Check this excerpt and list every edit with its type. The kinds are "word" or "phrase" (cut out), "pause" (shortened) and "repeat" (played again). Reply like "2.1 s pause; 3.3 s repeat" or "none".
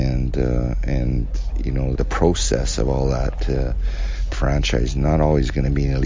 2.0 s word; 4.3 s phrase